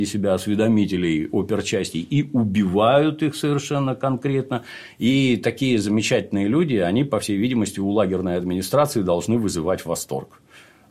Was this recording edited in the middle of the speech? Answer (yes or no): no